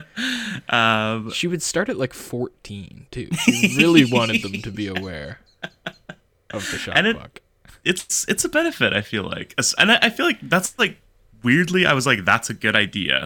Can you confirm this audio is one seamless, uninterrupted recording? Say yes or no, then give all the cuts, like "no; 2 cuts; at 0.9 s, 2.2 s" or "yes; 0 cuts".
yes; 0 cuts